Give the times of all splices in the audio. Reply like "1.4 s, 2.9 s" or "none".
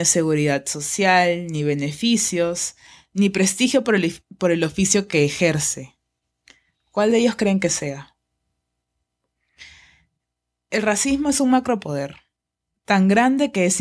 none